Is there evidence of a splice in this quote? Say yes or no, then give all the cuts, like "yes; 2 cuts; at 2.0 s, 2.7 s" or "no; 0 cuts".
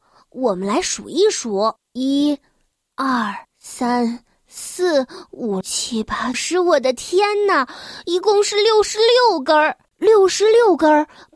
yes; 5 cuts; at 1.8 s, 3.4 s, 5.6 s, 6.3 s, 9.8 s